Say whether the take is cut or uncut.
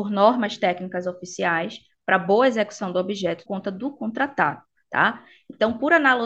cut